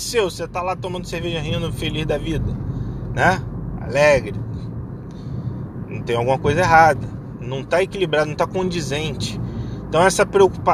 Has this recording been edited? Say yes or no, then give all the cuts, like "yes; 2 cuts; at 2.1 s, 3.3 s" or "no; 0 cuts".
no; 0 cuts